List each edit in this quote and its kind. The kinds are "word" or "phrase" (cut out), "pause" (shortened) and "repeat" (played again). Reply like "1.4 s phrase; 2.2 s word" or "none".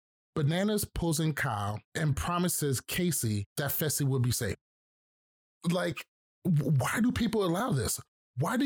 1.8 s pause; 3.5 s pause; 6.3 s pause